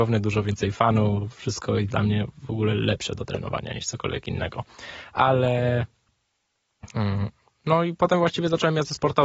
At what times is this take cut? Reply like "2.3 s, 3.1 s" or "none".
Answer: none